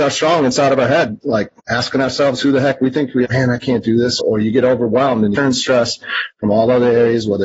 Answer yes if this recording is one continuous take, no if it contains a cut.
no